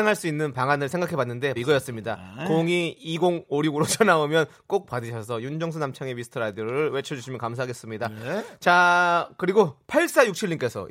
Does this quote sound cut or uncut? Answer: cut